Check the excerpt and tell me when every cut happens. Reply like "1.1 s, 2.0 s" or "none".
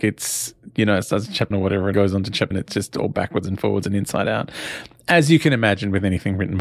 1.5 s, 1.9 s, 2.5 s